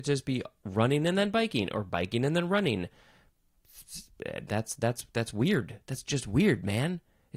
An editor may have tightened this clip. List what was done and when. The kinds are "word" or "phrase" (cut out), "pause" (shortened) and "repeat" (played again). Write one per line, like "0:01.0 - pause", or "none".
none